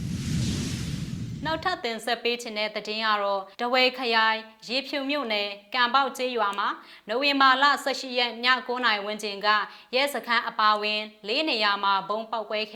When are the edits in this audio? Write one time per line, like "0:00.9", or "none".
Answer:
0:03.5

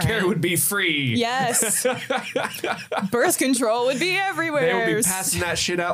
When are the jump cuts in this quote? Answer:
none

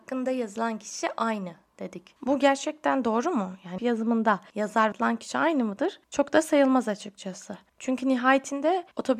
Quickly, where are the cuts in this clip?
0:03.8
0:04.9

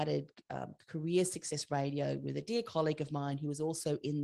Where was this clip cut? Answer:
none

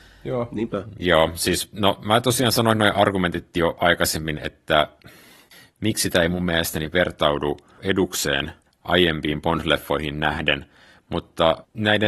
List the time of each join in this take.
none

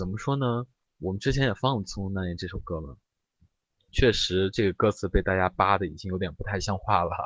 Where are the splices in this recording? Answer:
none

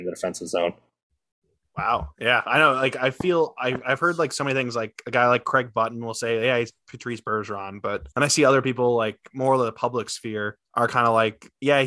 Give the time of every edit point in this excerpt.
0:08.1
0:10.6

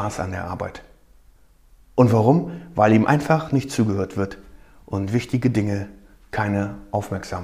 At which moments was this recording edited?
none

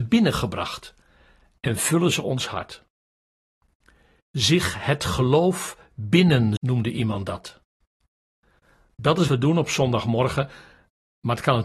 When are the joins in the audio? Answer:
0:06.6
0:09.3

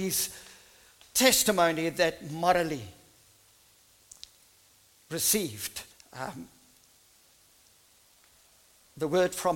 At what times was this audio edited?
0:05.9

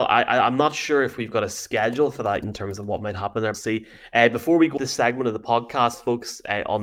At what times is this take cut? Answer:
0:02.4
0:03.5
0:04.8

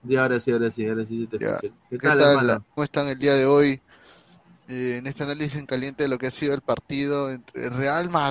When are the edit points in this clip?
0:02.8

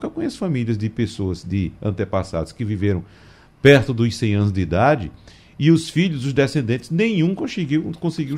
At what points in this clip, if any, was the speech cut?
none

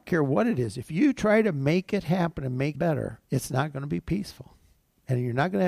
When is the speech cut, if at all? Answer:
0:02.7
0:03.2

